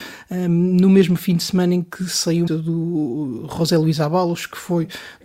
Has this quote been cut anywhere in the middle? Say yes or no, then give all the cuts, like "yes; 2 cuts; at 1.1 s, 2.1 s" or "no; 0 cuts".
yes; 1 cut; at 2.5 s